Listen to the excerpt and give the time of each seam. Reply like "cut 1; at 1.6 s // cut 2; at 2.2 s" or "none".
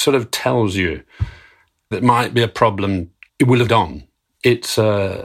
cut 1; at 1.9 s // cut 2; at 3.3 s // cut 3; at 3.7 s